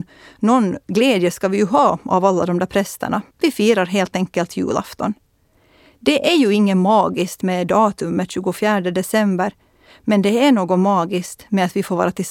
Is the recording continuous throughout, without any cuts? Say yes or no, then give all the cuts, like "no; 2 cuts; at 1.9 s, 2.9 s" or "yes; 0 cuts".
no; 1 cut; at 3.3 s